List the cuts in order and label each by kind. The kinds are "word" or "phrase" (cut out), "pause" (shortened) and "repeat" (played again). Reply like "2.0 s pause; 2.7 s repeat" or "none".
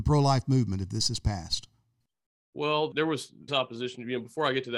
2.9 s word; 3.5 s word

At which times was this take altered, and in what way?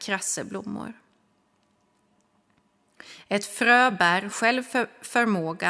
none

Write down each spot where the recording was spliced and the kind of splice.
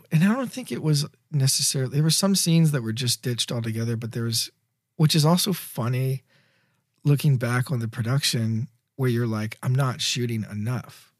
none

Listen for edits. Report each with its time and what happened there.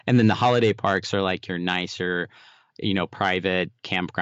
none

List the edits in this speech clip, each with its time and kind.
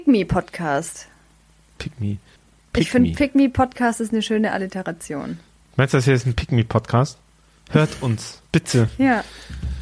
2.4 s pause

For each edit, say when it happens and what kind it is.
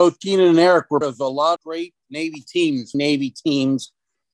1.0 s word; 1.6 s word; 2.9 s word

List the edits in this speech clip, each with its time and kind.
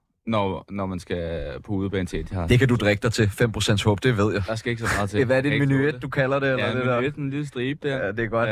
none

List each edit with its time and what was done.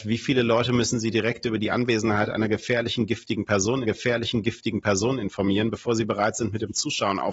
3.8 s repeat

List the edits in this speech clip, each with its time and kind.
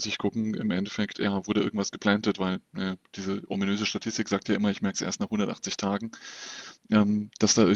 none

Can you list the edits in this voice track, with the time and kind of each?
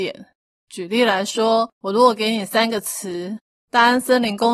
1.7 s pause

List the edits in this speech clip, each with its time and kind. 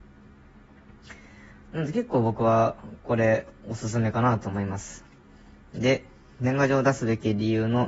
none

